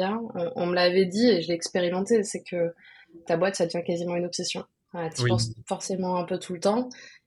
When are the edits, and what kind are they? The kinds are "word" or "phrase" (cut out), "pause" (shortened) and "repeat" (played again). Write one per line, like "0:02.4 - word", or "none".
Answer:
0:03.3 - word

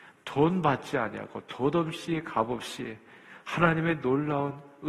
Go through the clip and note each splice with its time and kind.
none

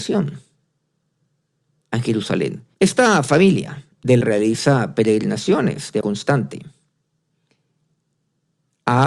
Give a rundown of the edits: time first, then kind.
0:02.7 - pause
0:04.2 - word
0:06.0 - word

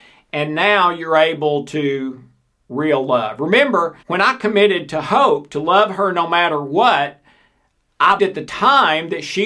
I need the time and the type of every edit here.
0:04.0 - pause
0:08.2 - word

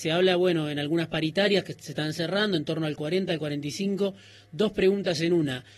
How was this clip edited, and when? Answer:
none

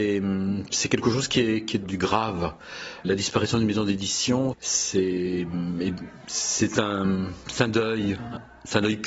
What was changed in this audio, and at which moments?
0:01.8 - word
0:03.0 - word
0:04.5 - word

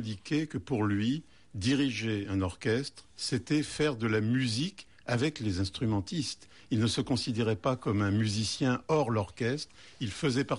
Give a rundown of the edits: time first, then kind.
none

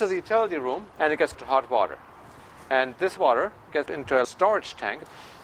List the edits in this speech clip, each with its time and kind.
0:01.3 - word
0:03.2 - word
0:03.9 - word
0:04.2 - word

